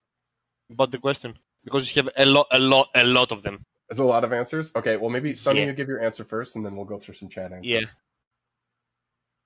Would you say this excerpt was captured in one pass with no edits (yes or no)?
yes